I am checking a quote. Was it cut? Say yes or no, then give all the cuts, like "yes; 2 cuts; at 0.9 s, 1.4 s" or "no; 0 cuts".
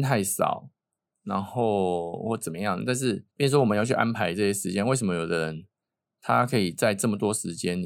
yes; 1 cut; at 3.3 s